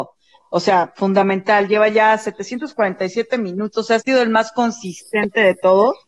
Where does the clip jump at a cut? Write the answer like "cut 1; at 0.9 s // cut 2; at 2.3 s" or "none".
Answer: none